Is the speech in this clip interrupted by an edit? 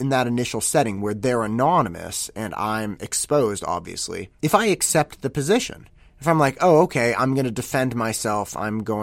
yes; 2 cuts; at 4.4 s, 6.0 s

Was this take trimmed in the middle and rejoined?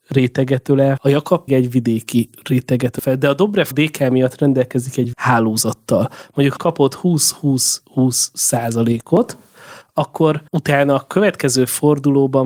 yes; 7 cuts; at 1.0 s, 1.5 s, 3.0 s, 3.7 s, 5.1 s, 6.6 s, 10.5 s

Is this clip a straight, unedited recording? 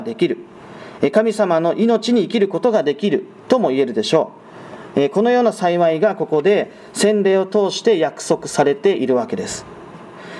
yes; 0 cuts

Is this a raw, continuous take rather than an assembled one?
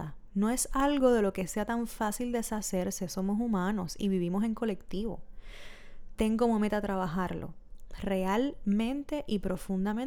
yes; 0 cuts

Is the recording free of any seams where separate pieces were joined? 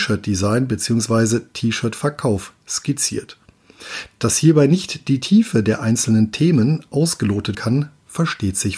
no; 1 cut; at 7.5 s

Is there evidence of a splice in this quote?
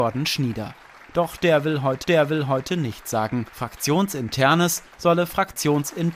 yes; 2 cuts; at 2.0 s, 3.5 s

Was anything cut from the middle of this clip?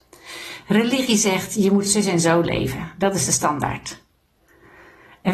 no; 0 cuts

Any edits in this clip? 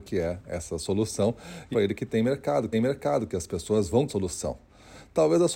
yes; 3 cuts; at 1.7 s, 2.7 s, 4.1 s

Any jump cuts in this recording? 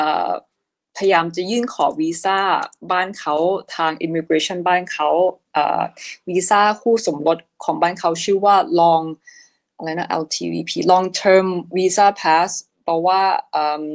no; 0 cuts

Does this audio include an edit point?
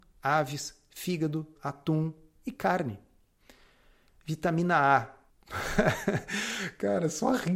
yes; 1 cut; at 1.5 s

